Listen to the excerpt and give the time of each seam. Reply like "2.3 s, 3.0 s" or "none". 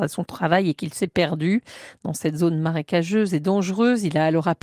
none